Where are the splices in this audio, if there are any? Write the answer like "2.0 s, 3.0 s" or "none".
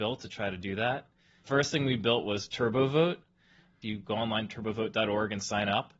1.4 s